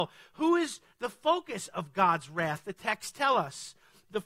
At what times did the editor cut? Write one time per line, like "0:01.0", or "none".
none